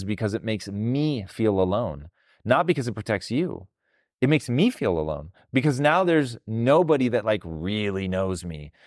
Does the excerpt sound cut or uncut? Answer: uncut